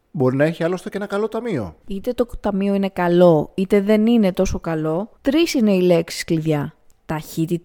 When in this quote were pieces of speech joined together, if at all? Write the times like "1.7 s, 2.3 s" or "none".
1.8 s, 5.2 s